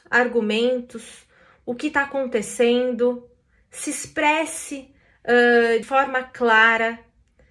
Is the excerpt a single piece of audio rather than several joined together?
no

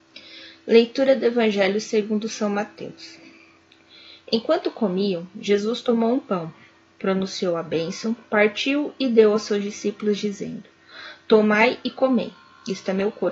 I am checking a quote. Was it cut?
no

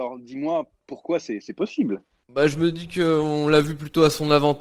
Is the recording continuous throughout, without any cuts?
yes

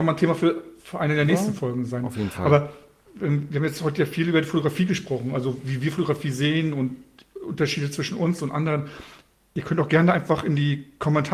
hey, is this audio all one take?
yes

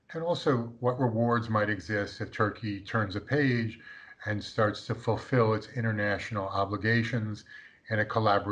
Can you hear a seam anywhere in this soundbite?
no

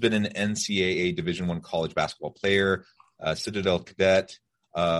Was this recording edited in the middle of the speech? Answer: no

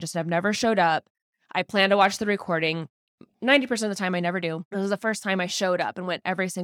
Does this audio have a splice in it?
no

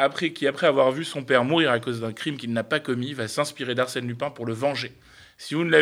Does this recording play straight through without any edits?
yes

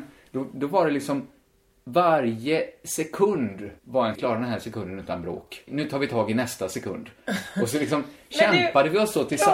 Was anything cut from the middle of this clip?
yes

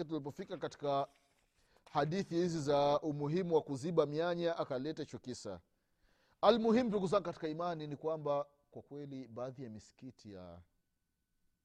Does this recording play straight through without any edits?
yes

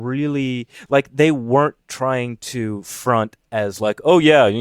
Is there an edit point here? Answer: no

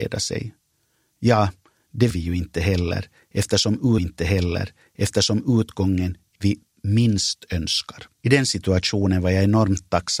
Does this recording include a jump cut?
yes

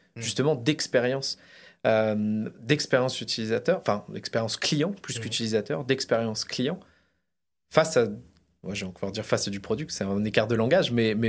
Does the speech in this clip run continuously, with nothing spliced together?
yes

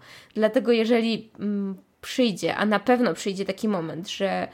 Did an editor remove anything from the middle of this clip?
no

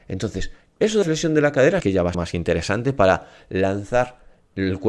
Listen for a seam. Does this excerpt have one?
yes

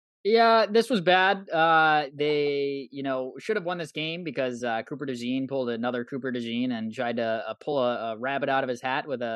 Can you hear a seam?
no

